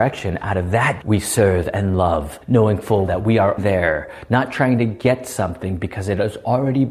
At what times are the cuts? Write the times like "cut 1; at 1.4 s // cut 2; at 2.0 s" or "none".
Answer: cut 1; at 1.0 s // cut 2; at 2.4 s // cut 3; at 3.0 s // cut 4; at 3.6 s